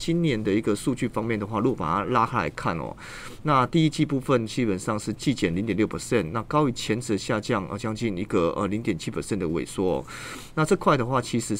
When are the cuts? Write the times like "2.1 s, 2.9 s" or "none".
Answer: none